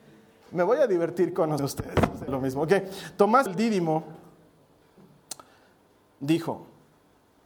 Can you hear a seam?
yes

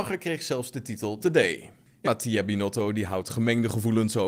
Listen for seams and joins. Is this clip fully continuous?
no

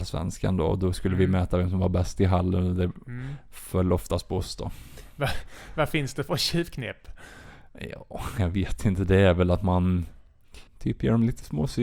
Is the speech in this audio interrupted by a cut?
yes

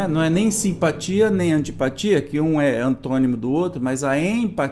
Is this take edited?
no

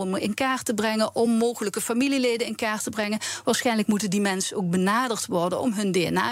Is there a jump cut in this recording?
no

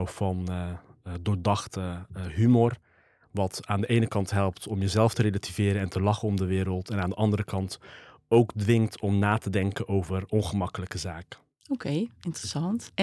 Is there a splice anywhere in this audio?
no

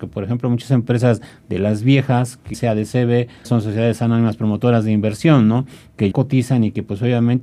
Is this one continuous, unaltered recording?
no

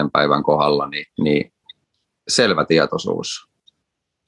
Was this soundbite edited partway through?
yes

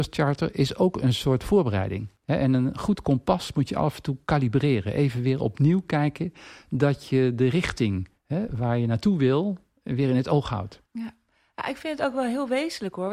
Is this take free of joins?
no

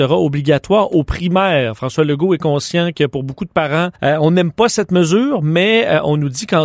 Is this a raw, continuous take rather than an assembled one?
no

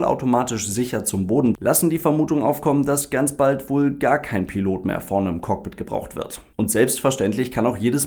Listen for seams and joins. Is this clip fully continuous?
no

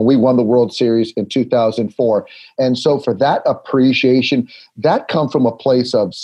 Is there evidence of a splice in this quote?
no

